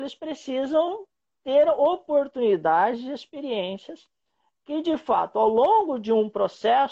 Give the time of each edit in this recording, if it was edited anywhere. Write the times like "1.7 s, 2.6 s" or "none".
none